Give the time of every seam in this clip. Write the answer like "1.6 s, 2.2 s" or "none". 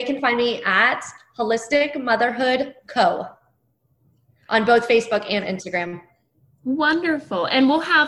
none

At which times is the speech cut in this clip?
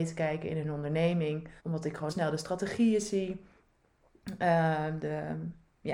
1.6 s, 2.1 s

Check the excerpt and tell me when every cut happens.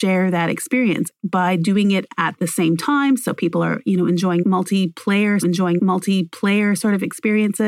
5.4 s

